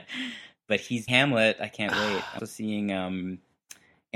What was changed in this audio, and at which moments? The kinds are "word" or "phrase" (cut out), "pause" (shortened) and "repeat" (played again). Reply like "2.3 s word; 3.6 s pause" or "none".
1.1 s word; 2.4 s word